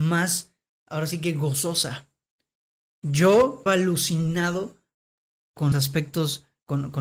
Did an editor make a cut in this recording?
yes; 2 cuts; at 3.7 s, 5.7 s

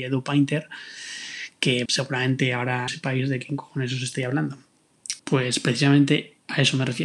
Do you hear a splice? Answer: yes; 3 cuts; at 1.9 s, 2.9 s, 5.2 s

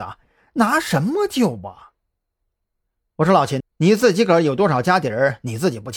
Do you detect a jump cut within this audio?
yes; 1 cut; at 3.6 s

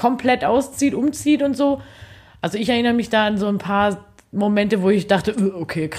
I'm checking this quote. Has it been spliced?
no; 0 cuts

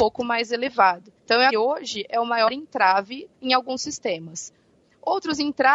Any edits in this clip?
yes; 3 cuts; at 1.2 s, 1.5 s, 3.3 s

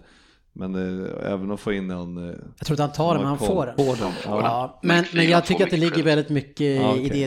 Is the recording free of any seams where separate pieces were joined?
no; 2 cuts; at 2.6 s, 3.8 s

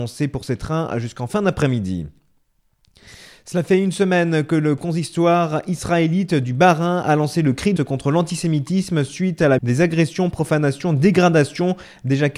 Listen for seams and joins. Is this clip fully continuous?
no; 2 cuts; at 7.8 s, 9.6 s

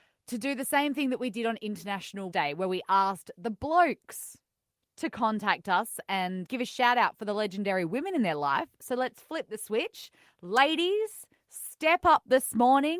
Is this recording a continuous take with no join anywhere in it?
no; 2 cuts; at 2.3 s, 6.4 s

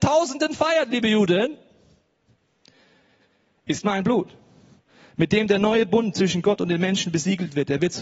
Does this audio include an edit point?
no; 0 cuts

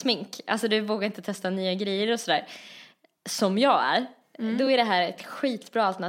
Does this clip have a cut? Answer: no; 0 cuts

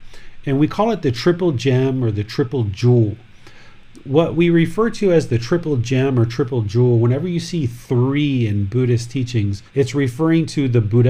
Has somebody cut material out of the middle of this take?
yes; 1 cut; at 9.7 s

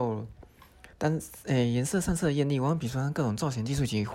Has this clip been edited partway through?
yes; 1 cut; at 0.9 s

